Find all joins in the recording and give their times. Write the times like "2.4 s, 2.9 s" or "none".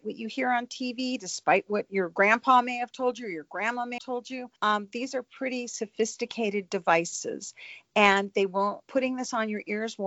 4.0 s, 4.6 s, 8.8 s